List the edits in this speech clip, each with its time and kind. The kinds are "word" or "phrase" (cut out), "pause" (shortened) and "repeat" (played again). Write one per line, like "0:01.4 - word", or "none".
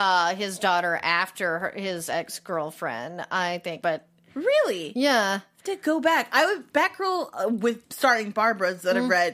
0:03.8 - phrase
0:06.7 - word
0:07.8 - pause